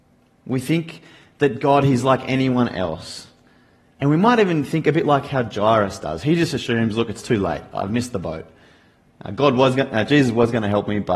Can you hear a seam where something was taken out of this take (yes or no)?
no